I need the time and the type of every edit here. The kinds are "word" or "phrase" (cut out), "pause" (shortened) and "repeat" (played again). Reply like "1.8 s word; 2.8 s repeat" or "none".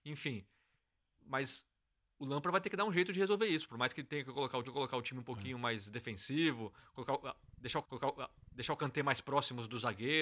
4.6 s repeat; 7.8 s repeat